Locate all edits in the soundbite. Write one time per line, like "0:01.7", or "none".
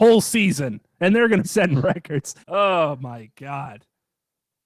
0:01.4
0:02.4